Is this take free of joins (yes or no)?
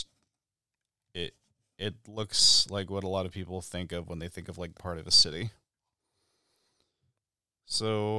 no